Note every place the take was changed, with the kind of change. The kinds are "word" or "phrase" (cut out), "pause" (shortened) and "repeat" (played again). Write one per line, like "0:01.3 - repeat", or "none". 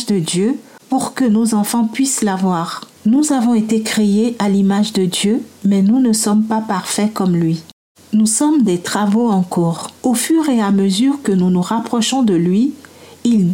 0:02.9 - pause
0:05.6 - pause
0:10.0 - pause